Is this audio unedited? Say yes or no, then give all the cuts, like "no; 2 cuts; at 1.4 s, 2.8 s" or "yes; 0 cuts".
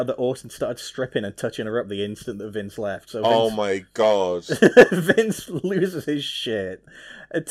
yes; 0 cuts